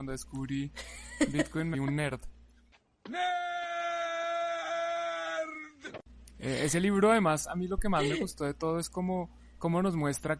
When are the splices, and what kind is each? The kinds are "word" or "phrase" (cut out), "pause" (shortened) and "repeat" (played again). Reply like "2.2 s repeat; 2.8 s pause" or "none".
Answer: 1.7 s word

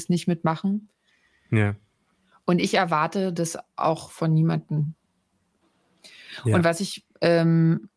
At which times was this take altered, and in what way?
none

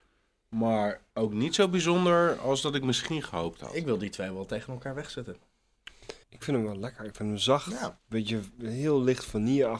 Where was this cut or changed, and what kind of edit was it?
1.1 s pause; 6.2 s pause; 8.0 s pause

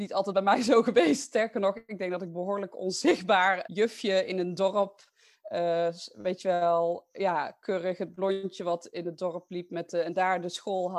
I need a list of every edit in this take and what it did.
3.7 s word

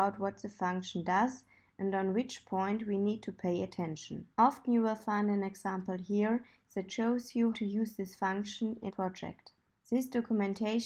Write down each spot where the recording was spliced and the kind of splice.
4.3 s pause; 7.5 s word; 8.9 s word

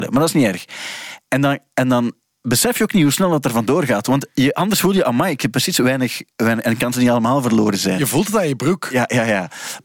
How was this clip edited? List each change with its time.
6.3 s pause

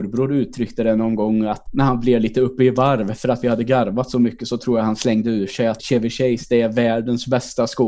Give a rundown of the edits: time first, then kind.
1.7 s word; 5.8 s word

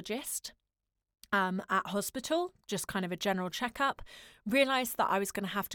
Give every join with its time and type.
none

